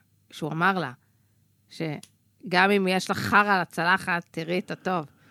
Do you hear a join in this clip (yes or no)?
no